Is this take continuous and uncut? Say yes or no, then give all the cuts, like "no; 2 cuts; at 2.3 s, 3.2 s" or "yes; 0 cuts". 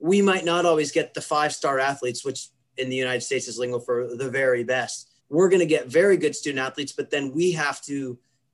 no; 1 cut; at 5.2 s